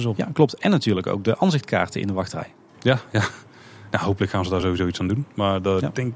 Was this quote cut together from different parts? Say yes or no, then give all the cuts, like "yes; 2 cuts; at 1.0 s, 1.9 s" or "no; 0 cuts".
no; 0 cuts